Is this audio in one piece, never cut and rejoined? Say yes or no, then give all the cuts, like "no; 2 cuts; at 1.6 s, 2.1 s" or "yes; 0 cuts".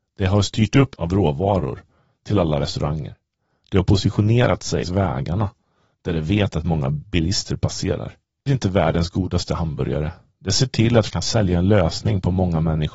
no; 4 cuts; at 0.9 s, 4.8 s, 8.5 s, 11.1 s